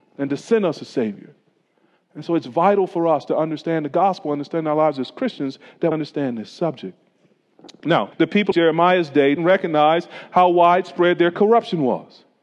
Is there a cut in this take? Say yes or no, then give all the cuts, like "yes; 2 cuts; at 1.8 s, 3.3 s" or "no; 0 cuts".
yes; 4 cuts; at 5.9 s, 8.1 s, 8.5 s, 9.4 s